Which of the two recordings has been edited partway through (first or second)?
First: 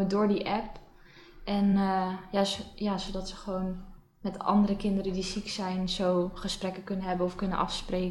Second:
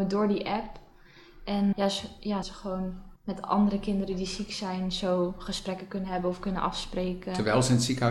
second